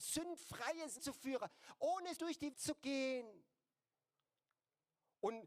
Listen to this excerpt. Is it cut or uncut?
cut